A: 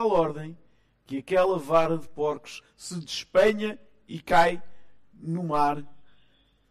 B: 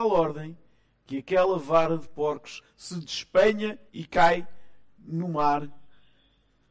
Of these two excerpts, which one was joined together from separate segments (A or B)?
B